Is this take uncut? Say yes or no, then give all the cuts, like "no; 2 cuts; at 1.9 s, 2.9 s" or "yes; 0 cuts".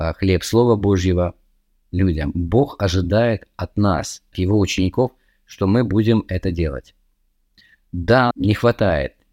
no; 2 cuts; at 4.3 s, 8.3 s